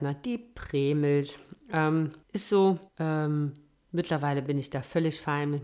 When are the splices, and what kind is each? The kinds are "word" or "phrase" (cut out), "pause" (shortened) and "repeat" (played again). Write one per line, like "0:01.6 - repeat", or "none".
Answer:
0:02.2 - pause
0:02.9 - pause